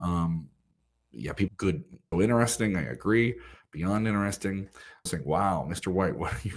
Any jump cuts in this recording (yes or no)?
yes